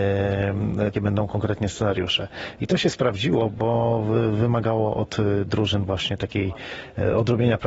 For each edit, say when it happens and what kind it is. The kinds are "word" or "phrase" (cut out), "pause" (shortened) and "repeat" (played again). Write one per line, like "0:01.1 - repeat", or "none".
0:00.9 - phrase